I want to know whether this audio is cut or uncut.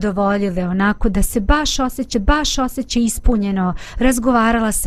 cut